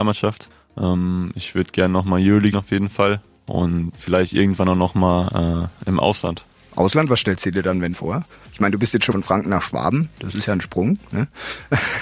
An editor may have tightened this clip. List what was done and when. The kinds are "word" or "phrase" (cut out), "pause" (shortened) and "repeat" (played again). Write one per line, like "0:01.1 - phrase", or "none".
0:02.5 - word
0:03.9 - word
0:07.9 - word
0:09.1 - word